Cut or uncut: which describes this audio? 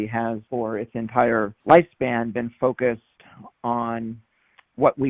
cut